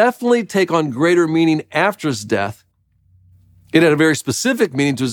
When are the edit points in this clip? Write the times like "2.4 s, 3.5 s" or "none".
none